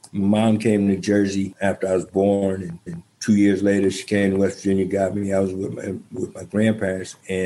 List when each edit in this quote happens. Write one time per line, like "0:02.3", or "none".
0:02.9